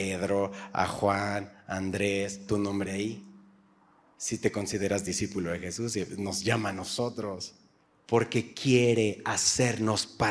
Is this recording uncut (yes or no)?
no